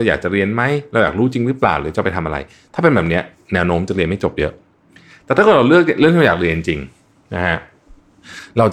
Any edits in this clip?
no; 0 cuts

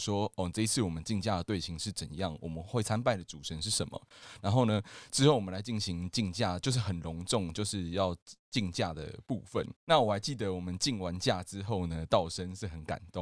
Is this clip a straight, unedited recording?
no; 2 cuts; at 8.4 s, 9.8 s

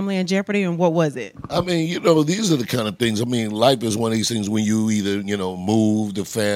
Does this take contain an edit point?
no; 0 cuts

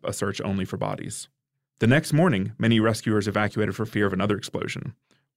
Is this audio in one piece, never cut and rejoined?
yes; 0 cuts

